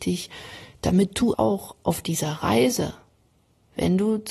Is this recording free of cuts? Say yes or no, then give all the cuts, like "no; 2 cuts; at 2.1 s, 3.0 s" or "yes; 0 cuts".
no; 1 cut; at 1.3 s